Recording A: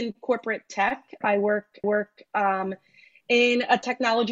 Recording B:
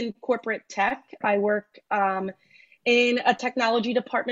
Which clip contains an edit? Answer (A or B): A